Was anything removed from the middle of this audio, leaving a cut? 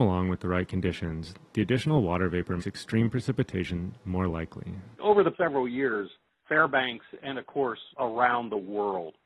yes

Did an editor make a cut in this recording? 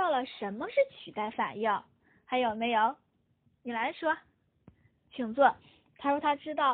no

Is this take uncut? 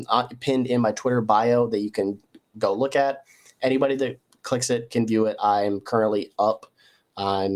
yes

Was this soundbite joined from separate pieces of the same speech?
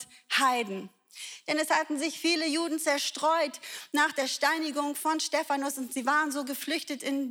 no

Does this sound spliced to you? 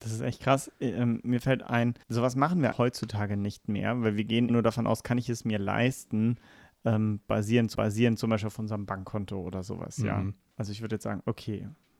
yes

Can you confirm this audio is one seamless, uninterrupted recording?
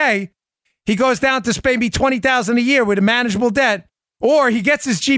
yes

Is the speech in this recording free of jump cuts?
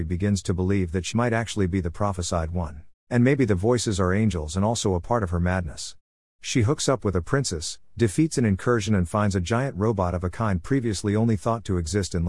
no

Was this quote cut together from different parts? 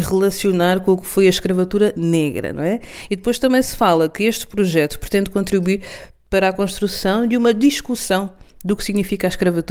no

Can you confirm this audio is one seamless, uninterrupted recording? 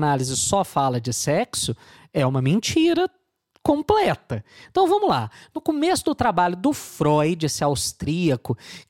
yes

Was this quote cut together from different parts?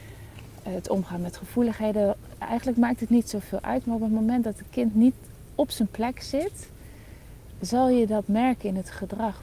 no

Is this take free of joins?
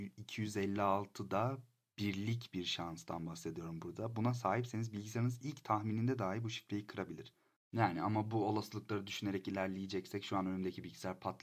yes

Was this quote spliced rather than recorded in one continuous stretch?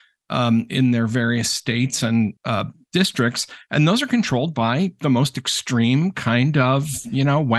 yes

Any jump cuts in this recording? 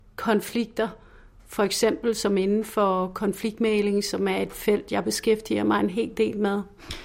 no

